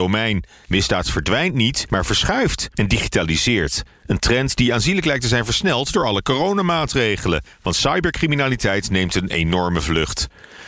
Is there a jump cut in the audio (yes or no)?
no